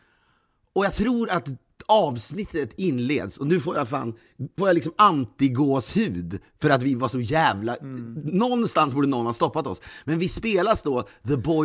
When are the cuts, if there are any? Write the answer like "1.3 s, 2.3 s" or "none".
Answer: 4.6 s